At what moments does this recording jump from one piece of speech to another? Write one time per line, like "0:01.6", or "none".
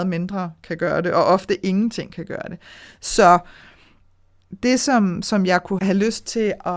0:05.8